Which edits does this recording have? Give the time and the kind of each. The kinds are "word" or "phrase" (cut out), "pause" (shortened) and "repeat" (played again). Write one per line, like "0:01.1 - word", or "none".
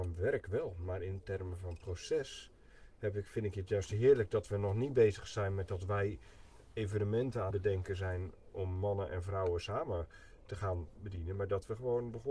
0:07.5 - word
0:11.0 - word